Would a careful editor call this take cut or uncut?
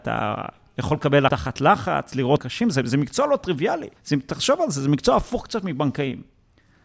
cut